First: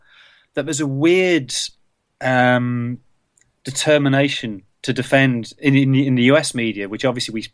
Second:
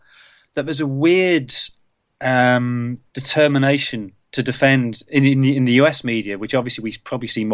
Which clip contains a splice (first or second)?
second